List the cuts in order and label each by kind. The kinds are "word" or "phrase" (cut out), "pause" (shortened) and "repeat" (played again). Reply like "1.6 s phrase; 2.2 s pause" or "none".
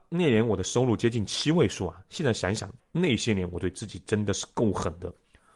2.8 s pause